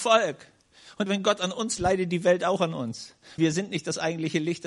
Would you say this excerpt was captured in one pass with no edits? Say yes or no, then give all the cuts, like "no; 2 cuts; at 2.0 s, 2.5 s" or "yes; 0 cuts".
no; 3 cuts; at 1.1 s, 1.8 s, 3.4 s